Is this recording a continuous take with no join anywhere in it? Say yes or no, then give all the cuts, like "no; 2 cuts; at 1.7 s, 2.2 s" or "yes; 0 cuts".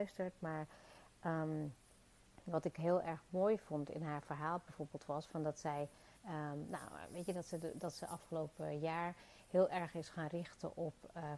no; 1 cut; at 6.2 s